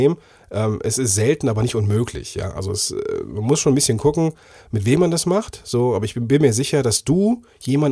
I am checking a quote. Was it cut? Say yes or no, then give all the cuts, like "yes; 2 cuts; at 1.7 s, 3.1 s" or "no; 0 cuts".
no; 0 cuts